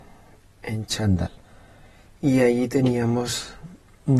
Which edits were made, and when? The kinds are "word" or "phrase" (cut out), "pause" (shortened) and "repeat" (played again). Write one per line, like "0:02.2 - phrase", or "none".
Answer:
none